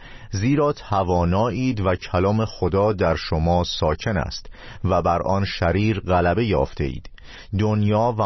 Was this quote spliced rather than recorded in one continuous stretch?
no; 0 cuts

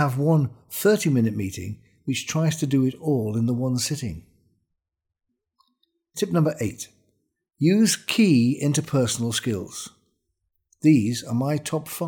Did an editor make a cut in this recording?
no; 0 cuts

